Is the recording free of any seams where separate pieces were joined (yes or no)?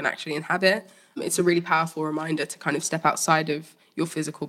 yes